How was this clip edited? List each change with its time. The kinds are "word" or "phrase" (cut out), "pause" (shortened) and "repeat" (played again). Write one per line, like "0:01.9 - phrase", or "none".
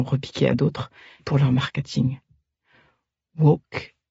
0:01.2 - word